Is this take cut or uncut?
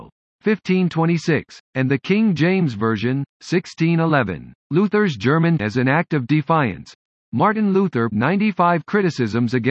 cut